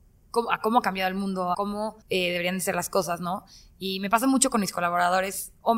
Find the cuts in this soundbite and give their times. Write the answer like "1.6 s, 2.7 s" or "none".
1.5 s, 2.0 s